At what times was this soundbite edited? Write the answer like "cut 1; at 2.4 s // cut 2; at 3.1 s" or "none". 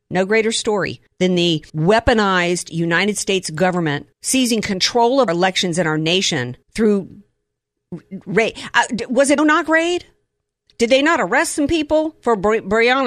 cut 1; at 1.1 s // cut 2; at 1.7 s // cut 3; at 4.1 s // cut 4; at 5.3 s // cut 5; at 6.6 s // cut 6; at 9.4 s

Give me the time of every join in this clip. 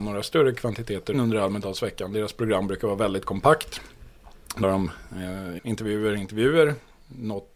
cut 1; at 1.1 s // cut 2; at 4.6 s // cut 3; at 5.6 s

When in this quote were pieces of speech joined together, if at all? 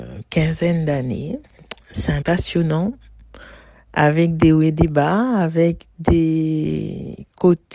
cut 1; at 2.2 s

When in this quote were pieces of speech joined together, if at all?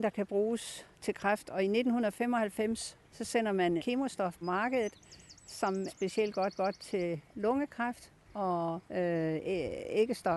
cut 1; at 0.9 s // cut 2; at 3.0 s // cut 3; at 3.8 s // cut 4; at 4.4 s // cut 5; at 5.9 s // cut 6; at 6.6 s // cut 7; at 8.2 s // cut 8; at 8.9 s

